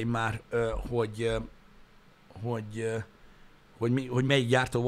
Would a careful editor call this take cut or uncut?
uncut